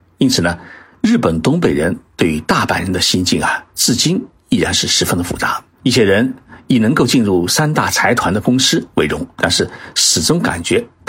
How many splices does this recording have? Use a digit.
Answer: 3